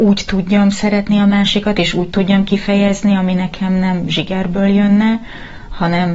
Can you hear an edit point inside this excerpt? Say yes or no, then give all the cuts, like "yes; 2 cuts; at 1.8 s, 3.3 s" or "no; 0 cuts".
no; 0 cuts